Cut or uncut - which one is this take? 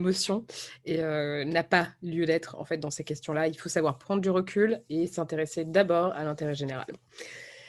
uncut